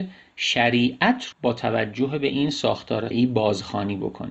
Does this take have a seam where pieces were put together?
yes; 2 cuts; at 1.3 s, 3.1 s

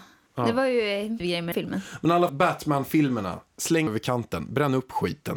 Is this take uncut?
no; 4 cuts; at 1.2 s, 1.5 s, 2.3 s, 3.9 s

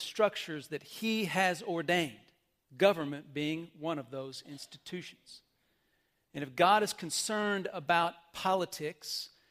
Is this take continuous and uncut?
yes; 0 cuts

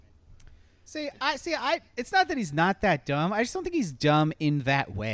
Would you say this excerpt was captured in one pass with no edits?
yes; 0 cuts

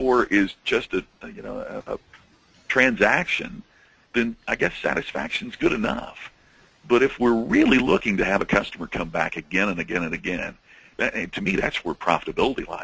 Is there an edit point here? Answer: no; 0 cuts

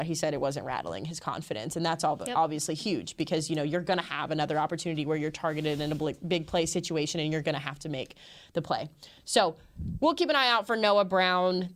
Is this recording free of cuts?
yes; 0 cuts

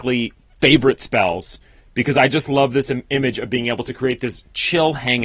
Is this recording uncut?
yes; 0 cuts

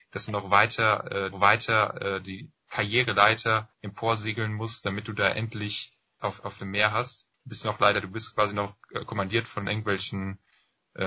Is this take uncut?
no; 5 cuts; at 1.3 s, 3.7 s, 6.2 s, 7.3 s, 8.0 s

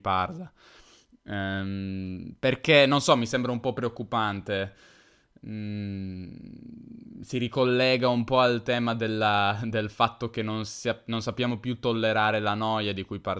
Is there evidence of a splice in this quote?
no; 0 cuts

